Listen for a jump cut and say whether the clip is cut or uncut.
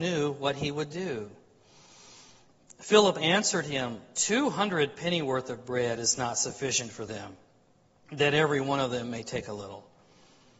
uncut